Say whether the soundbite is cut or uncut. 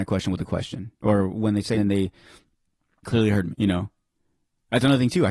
cut